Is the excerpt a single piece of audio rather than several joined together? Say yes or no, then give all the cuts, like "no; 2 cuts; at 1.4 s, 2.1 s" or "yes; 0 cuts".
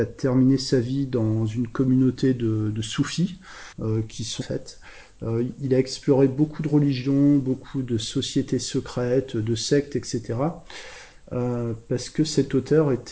no; 2 cuts; at 3.7 s, 4.4 s